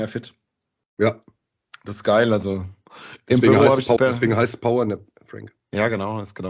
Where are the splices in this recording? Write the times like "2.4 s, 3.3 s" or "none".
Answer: 4.0 s